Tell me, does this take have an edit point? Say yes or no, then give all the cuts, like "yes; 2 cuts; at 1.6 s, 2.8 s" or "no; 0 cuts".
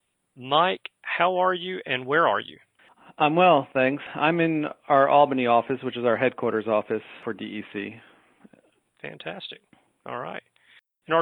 no; 0 cuts